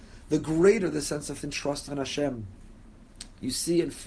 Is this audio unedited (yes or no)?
no